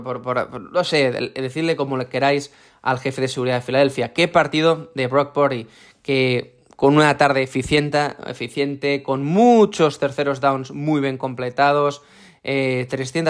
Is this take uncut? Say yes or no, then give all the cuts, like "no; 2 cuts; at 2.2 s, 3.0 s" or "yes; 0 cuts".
yes; 0 cuts